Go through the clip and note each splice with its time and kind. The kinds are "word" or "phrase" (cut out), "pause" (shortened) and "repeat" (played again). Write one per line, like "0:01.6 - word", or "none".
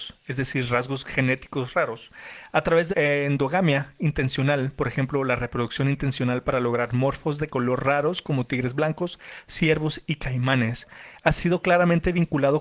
0:02.9 - phrase